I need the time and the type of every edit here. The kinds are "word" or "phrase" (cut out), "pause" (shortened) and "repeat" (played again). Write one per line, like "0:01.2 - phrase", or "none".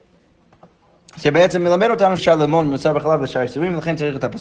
0:02.2 - word